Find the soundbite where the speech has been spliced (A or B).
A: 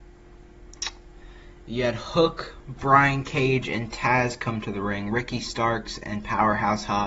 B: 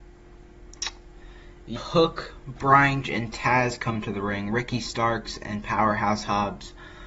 B